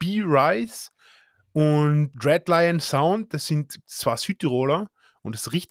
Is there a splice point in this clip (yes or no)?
no